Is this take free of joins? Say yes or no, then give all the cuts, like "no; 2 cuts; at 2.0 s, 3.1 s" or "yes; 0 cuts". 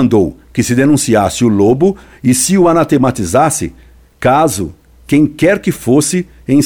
yes; 0 cuts